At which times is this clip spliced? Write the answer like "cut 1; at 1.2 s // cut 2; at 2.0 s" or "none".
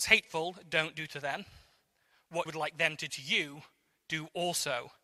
cut 1; at 2.5 s // cut 2; at 3.1 s